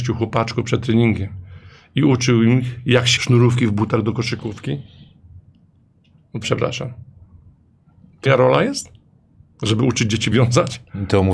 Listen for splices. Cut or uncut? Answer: cut